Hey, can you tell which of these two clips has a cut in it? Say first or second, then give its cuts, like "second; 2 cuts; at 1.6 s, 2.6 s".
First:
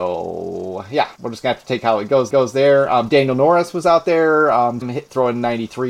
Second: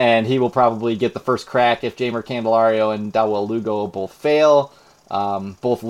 first; 3 cuts; at 1.2 s, 2.3 s, 4.8 s